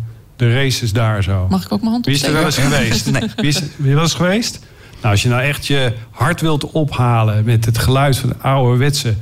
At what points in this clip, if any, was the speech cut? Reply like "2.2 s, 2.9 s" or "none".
none